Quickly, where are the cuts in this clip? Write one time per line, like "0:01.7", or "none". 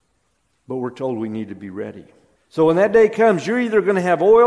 0:02.4